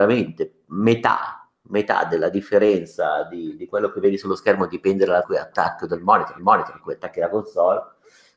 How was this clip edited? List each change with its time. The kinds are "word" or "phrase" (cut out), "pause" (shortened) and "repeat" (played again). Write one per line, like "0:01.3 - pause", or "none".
0:05.2 - phrase
0:06.4 - repeat

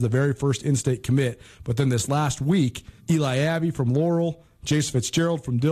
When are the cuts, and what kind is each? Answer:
0:03.0 - pause

